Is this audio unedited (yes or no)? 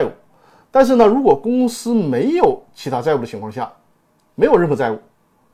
yes